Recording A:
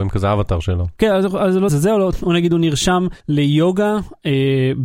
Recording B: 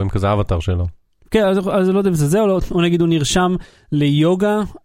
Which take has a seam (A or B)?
A